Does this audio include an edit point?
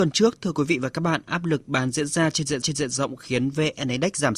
yes; 1 cut; at 2.6 s

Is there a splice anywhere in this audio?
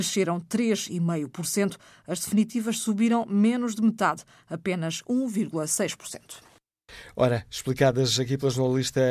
no; 0 cuts

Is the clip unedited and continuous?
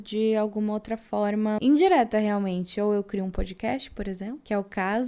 no; 1 cut; at 1.6 s

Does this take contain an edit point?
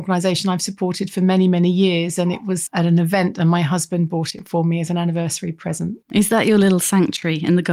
yes; 1 cut; at 6.0 s

